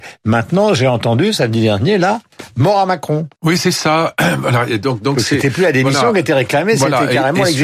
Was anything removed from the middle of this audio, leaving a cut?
yes; 1 cut; at 3.3 s

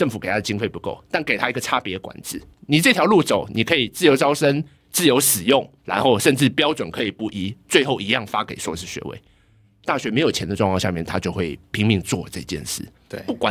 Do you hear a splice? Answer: yes; 3 cuts; at 2.5 s, 4.7 s, 5.8 s

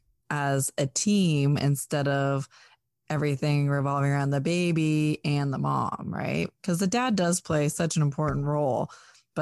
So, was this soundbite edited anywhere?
no; 0 cuts

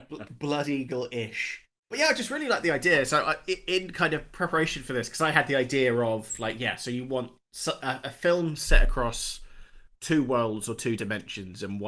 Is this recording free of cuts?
no; 1 cut; at 9.9 s

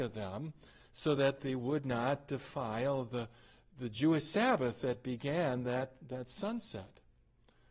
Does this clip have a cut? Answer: no; 0 cuts

